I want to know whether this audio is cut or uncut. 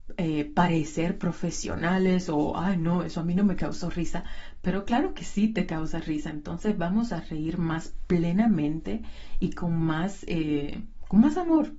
uncut